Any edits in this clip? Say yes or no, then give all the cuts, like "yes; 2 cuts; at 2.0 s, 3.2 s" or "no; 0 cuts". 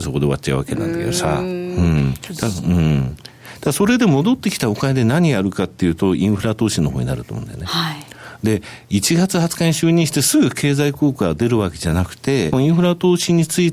yes; 1 cut; at 12.5 s